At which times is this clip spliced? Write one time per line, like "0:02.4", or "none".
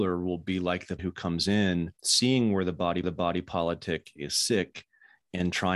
0:01.0
0:02.0
0:03.0